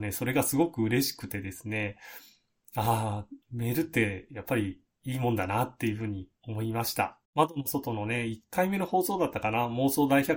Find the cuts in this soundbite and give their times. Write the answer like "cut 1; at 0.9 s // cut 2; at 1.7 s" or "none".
cut 1; at 3.4 s // cut 2; at 6.4 s // cut 3; at 7.2 s